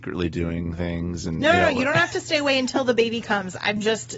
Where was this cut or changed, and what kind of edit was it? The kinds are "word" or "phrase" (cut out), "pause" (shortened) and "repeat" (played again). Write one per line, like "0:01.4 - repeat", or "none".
none